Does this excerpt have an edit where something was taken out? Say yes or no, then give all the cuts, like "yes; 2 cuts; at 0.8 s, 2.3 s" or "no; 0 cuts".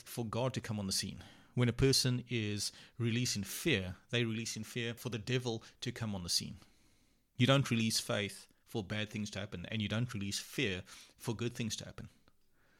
no; 0 cuts